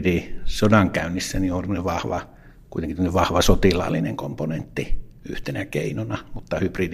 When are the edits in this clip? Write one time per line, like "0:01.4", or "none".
none